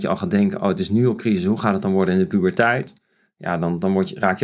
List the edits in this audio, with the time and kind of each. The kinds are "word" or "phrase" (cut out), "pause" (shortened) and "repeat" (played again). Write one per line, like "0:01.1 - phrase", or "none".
none